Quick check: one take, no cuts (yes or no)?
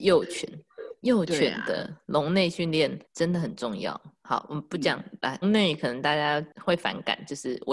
no